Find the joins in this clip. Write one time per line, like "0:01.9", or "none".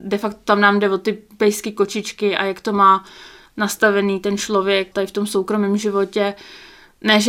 0:04.9